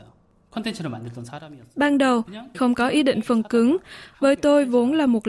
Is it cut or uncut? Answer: cut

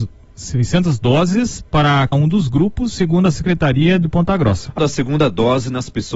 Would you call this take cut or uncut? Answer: cut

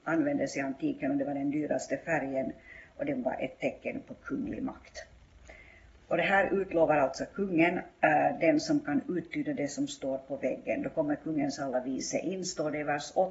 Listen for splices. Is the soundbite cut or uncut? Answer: uncut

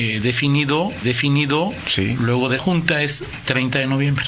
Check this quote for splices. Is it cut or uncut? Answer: cut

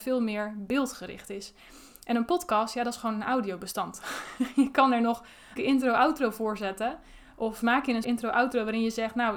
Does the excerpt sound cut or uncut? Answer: cut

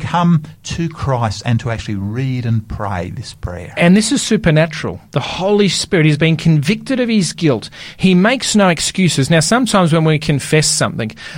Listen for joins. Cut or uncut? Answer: uncut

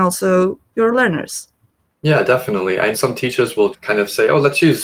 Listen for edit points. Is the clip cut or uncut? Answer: cut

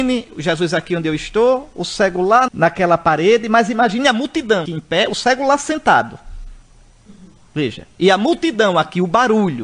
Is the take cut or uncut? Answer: cut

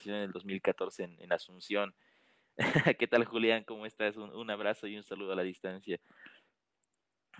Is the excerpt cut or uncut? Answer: uncut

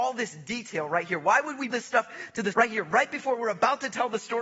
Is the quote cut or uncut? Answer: cut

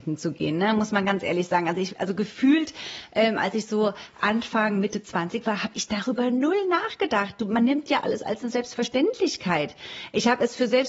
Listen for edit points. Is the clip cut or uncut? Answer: uncut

